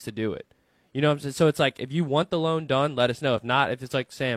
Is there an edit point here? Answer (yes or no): no